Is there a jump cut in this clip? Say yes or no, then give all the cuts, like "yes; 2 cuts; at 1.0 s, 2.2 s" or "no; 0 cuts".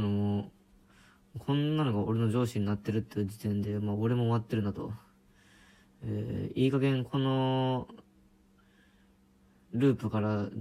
no; 0 cuts